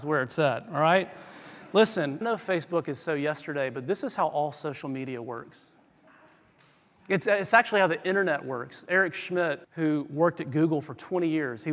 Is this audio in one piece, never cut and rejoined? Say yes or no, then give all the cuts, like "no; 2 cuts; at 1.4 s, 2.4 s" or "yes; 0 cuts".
no; 2 cuts; at 2.2 s, 9.6 s